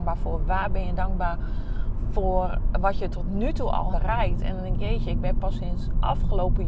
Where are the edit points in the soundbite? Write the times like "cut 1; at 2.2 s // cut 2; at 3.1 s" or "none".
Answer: cut 1; at 3.9 s